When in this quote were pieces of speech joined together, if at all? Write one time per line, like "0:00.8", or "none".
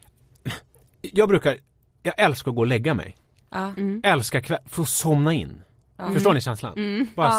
none